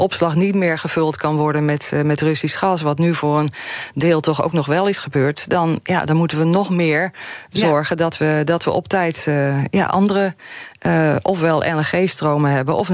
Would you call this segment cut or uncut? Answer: uncut